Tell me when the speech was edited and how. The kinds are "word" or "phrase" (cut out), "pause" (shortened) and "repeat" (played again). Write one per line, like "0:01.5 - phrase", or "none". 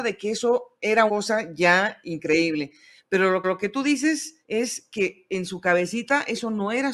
0:01.1 - word
0:03.4 - repeat
0:04.4 - pause